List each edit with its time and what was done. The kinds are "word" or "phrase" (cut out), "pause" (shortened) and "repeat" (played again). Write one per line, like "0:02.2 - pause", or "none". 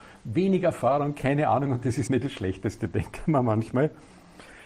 0:02.1 - word